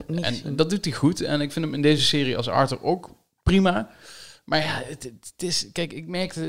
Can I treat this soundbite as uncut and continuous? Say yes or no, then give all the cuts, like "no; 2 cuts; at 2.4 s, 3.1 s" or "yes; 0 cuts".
yes; 0 cuts